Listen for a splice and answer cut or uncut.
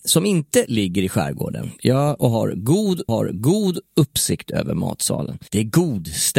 cut